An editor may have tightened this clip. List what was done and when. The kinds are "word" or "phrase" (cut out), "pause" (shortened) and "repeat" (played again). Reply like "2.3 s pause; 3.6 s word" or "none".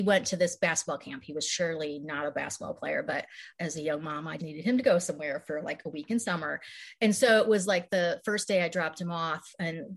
3.5 s pause; 4.4 s word